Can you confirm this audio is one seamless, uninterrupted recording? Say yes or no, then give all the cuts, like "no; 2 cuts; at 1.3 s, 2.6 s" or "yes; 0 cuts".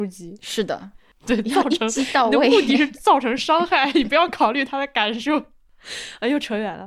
yes; 0 cuts